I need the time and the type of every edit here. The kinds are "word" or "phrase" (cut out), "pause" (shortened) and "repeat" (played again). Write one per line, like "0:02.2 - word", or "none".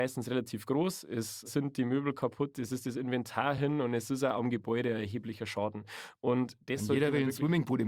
none